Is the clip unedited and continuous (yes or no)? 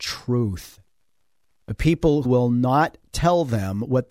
no